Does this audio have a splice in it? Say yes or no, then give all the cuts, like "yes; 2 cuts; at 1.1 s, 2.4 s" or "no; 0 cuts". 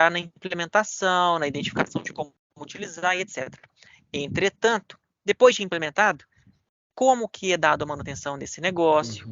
no; 0 cuts